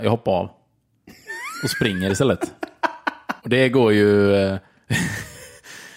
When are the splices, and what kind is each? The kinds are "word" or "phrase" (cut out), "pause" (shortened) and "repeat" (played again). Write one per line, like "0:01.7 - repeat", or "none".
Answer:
0:03.4 - pause